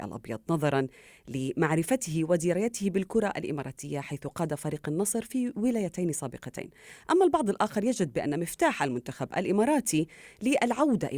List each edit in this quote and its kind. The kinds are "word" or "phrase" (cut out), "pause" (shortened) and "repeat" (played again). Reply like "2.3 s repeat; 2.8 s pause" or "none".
none